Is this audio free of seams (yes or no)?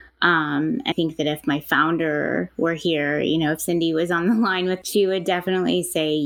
no